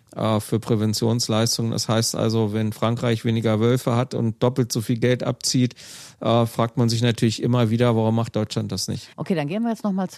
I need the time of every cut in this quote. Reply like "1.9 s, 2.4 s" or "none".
9.1 s